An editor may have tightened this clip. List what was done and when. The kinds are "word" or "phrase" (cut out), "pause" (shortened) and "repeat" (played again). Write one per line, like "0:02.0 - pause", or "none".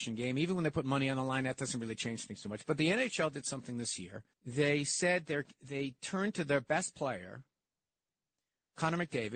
0:04.3 - pause